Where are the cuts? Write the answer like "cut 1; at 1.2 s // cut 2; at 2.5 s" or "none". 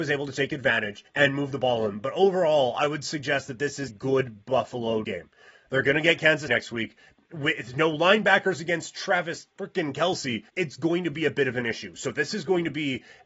cut 1; at 1.1 s // cut 2; at 3.9 s // cut 3; at 5.0 s // cut 4; at 6.5 s // cut 5; at 9.5 s // cut 6; at 10.5 s